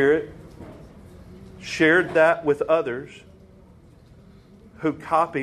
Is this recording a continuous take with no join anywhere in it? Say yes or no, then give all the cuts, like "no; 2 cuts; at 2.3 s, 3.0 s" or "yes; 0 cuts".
yes; 0 cuts